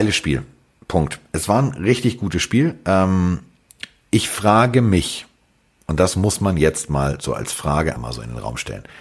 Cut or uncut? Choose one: cut